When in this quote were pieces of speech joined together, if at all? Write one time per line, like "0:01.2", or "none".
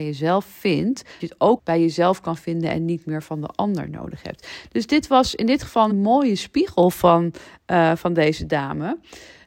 0:01.2
0:01.6
0:05.9